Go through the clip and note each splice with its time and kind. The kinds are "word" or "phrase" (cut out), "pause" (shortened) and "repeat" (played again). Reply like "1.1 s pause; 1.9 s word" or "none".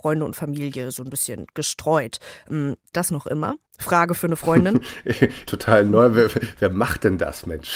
2.9 s word; 3.7 s pause; 5.5 s phrase